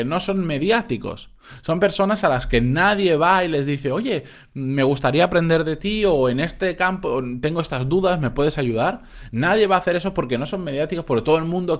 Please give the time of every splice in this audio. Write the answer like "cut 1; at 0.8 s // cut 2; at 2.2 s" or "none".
none